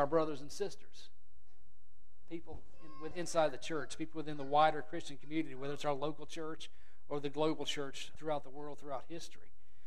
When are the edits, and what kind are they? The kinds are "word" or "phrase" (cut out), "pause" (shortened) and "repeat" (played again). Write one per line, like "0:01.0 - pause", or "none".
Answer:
0:03.1 - word
0:08.1 - word